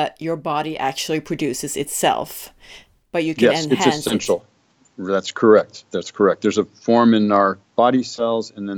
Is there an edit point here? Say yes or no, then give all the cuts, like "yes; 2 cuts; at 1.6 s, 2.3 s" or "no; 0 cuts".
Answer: yes; 1 cut; at 7.6 s